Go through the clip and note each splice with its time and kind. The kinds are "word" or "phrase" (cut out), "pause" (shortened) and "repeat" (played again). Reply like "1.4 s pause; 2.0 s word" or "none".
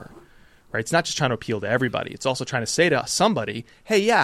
none